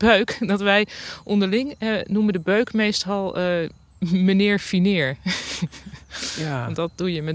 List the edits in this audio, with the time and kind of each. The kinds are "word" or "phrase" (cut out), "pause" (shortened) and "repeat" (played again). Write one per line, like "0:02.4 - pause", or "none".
none

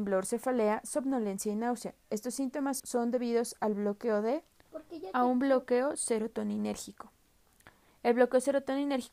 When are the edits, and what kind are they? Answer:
0:02.8 - word

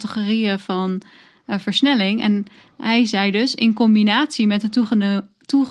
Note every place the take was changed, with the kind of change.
none

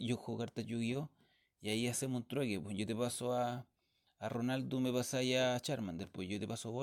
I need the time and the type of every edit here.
none

